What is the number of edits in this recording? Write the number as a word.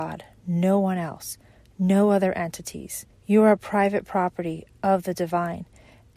one